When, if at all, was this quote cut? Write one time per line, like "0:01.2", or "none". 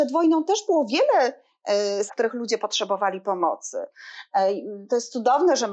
0:02.1